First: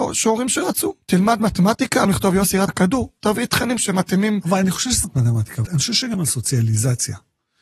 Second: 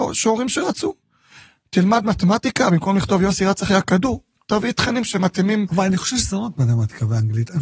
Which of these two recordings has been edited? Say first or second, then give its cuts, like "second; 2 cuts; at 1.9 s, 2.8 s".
first; 7 cuts; at 1.0 s, 2.0 s, 2.7 s, 3.2 s, 5.0 s, 5.6 s, 6.1 s